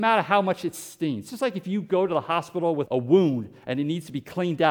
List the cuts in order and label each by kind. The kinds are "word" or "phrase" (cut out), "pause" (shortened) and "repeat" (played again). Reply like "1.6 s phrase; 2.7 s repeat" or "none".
2.9 s word